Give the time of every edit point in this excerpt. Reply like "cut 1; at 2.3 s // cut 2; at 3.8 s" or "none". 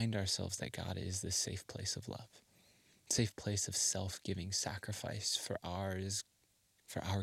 none